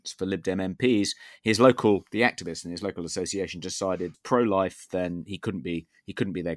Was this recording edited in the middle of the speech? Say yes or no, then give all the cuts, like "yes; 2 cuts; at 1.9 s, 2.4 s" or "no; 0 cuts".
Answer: yes; 1 cut; at 4.1 s